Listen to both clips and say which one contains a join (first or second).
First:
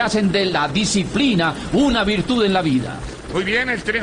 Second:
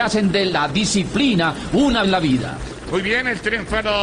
second